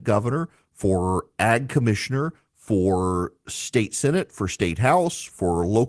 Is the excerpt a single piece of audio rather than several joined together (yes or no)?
yes